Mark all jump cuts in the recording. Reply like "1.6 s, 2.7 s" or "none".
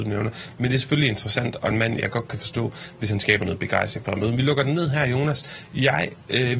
none